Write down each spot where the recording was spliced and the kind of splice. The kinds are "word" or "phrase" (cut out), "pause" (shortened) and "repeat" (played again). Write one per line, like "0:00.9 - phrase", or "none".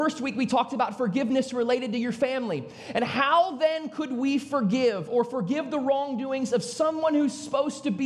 none